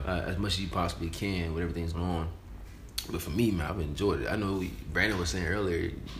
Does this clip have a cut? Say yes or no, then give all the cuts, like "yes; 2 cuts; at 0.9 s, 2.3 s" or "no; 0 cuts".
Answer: yes; 2 cuts; at 1.9 s, 3.7 s